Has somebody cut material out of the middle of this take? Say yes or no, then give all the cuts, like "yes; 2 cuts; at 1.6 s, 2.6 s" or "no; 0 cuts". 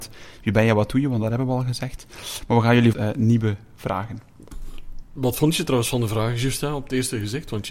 yes; 1 cut; at 2.9 s